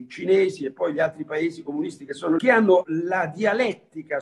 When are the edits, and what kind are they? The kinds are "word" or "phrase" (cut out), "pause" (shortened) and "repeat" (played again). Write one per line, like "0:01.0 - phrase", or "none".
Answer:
0:02.4 - word
0:02.8 - word